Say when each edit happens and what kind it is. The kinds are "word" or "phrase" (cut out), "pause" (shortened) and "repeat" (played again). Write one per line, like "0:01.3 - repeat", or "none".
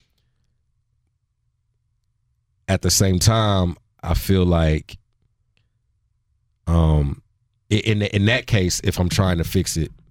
0:07.6 - pause